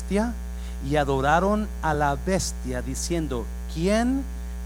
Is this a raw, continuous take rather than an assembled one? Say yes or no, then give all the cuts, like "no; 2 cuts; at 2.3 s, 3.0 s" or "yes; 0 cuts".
yes; 0 cuts